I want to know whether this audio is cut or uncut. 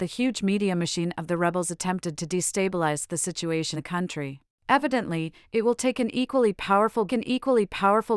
cut